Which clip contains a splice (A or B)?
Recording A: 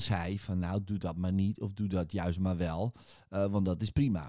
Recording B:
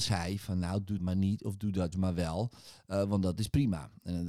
B